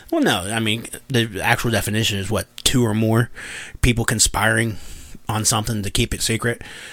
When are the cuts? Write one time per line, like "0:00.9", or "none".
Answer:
0:01.0
0:02.5